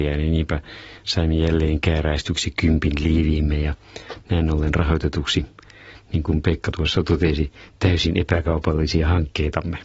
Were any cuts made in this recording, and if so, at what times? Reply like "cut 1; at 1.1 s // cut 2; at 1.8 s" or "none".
none